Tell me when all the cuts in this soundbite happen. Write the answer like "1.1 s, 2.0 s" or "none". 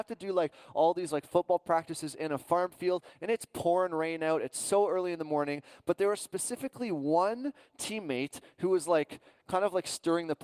none